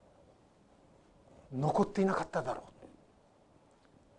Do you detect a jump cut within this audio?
no; 0 cuts

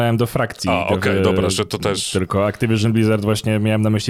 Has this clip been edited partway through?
no; 0 cuts

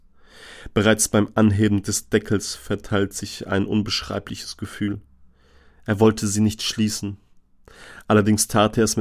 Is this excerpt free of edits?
yes; 0 cuts

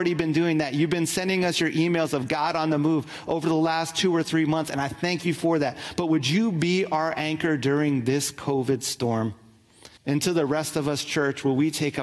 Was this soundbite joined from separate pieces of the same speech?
yes; 1 cut; at 10.0 s

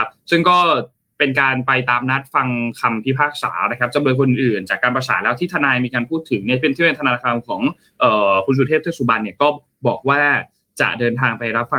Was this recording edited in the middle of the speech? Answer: no; 0 cuts

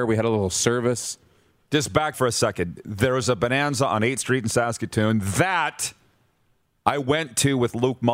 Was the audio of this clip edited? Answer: yes; 1 cut; at 2.1 s

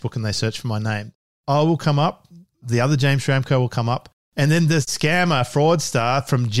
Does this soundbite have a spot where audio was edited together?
no; 0 cuts

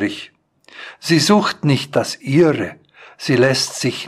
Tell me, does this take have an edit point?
no; 0 cuts

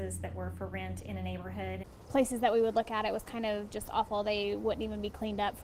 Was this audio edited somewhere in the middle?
no; 0 cuts

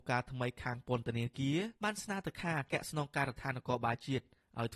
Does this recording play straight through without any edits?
no; 1 cut; at 1.8 s

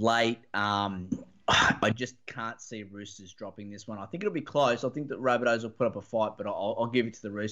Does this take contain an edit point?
no; 0 cuts

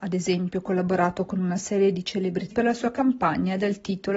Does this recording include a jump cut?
yes; 1 cut; at 2.5 s

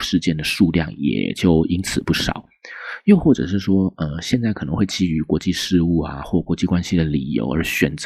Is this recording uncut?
yes; 0 cuts

